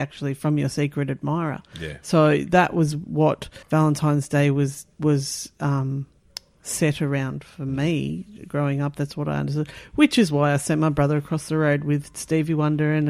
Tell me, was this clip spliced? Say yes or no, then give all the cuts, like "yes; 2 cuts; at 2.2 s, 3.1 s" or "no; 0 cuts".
yes; 2 cuts; at 3.6 s, 4.9 s